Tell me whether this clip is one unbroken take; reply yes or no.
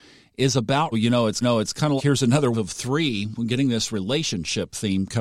no